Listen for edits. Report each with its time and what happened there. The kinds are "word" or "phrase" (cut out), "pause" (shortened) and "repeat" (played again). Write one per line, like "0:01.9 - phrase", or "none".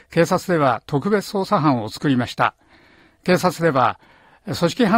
none